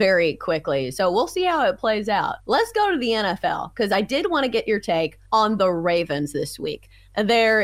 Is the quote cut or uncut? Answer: cut